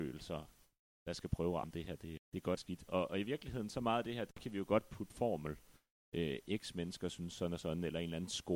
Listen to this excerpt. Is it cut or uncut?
cut